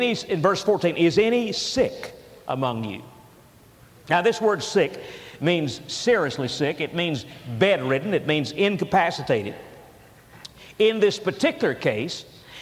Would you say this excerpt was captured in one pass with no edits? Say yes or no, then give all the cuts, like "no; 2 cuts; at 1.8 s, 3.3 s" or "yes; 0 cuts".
yes; 0 cuts